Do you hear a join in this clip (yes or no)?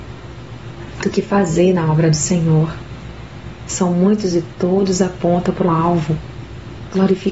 yes